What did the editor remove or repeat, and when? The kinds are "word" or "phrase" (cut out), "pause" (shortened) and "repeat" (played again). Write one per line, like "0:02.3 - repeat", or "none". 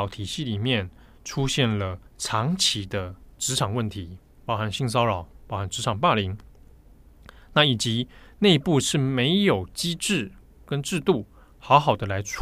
0:02.1 - pause